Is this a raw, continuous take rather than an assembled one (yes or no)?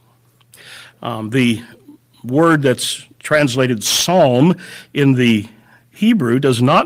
yes